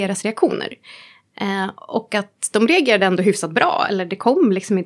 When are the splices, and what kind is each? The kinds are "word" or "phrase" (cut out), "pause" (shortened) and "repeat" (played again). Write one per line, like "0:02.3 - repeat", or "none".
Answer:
none